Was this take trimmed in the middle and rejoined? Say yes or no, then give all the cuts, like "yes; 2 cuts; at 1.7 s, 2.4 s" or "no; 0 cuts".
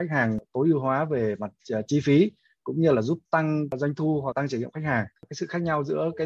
yes; 1 cut; at 4.3 s